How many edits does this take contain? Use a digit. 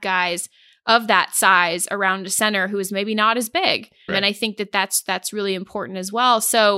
1